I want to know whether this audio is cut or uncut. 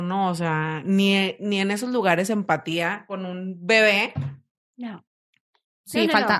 uncut